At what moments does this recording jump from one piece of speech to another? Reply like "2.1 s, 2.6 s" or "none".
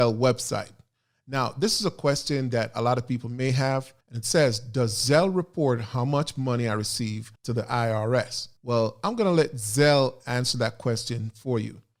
4.0 s, 7.4 s, 8.6 s